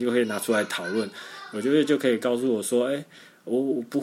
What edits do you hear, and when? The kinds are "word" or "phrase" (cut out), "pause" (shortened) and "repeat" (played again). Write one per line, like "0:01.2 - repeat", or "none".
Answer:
none